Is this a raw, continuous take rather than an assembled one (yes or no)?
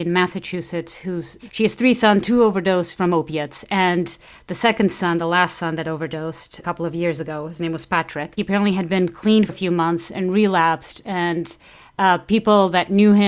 no